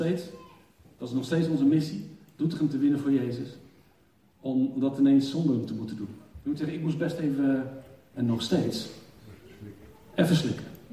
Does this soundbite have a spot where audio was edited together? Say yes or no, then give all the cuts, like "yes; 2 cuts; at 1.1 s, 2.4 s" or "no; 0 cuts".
no; 0 cuts